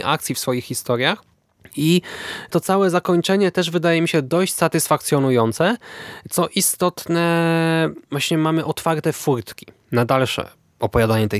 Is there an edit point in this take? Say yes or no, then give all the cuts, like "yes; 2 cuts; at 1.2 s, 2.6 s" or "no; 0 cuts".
yes; 2 cuts; at 1.3 s, 8.0 s